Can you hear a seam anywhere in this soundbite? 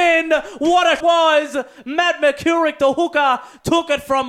yes; 1 cut; at 1.0 s

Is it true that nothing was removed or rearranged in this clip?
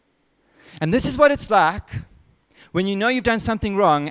yes; 0 cuts

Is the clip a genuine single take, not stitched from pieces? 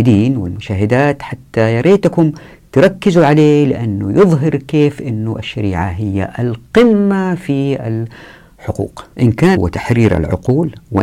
no; 2 cuts; at 9.1 s, 9.5 s

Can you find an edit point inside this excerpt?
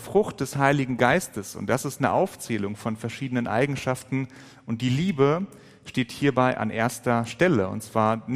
no; 0 cuts

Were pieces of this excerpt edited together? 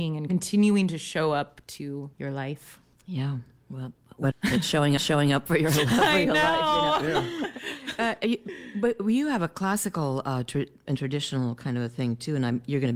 yes; 3 cuts; at 2.1 s, 4.3 s, 5.0 s

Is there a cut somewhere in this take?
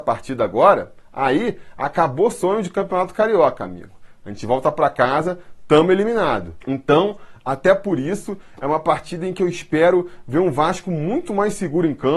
no; 0 cuts

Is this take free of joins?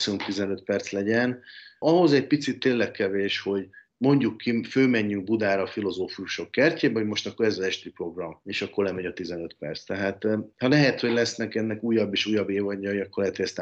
no; 1 cut; at 3.9 s

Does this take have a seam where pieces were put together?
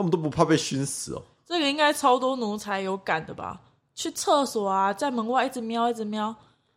no; 0 cuts

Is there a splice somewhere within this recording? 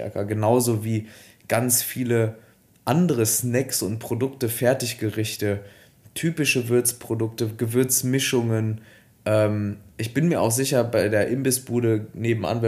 no; 0 cuts

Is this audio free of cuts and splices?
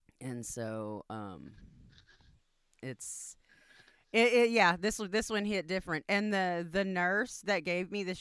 yes; 0 cuts

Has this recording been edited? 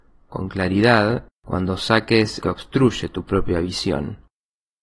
yes; 2 cuts; at 1.3 s, 2.4 s

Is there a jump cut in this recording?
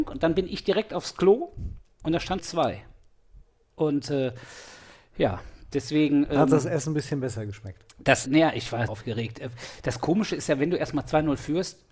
yes; 3 cuts; at 2.4 s, 8.3 s, 8.9 s

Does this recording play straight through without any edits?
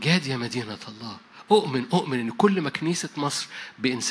yes; 0 cuts

